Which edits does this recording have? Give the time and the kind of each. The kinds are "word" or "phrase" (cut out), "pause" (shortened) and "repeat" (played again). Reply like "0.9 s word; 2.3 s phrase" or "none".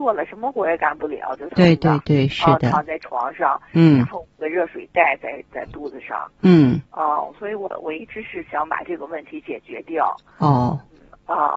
6.9 s pause